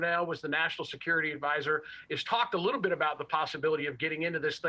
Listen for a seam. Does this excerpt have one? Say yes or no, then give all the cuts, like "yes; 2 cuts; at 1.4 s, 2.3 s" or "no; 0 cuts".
no; 0 cuts